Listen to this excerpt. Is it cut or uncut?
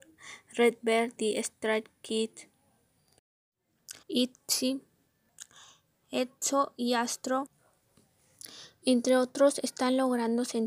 cut